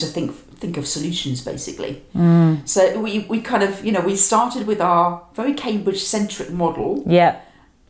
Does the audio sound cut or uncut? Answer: uncut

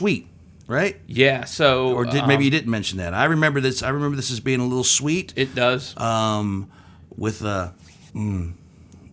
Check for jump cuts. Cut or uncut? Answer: cut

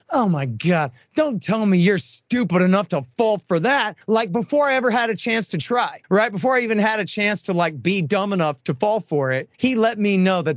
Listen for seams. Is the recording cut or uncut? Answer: cut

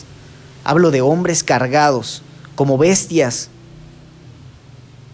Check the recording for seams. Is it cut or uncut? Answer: uncut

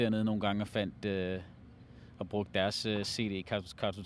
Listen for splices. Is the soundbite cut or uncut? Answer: uncut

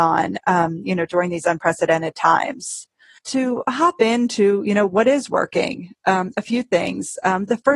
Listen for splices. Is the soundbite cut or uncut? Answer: cut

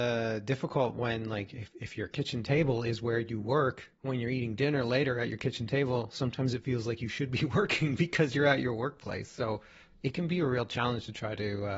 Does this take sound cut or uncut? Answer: uncut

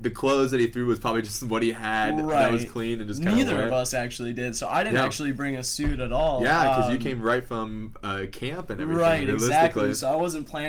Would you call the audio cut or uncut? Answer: uncut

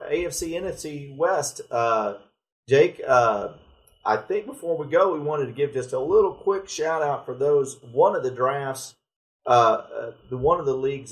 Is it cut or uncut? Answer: uncut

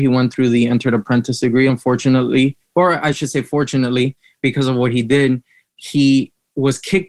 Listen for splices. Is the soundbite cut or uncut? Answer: uncut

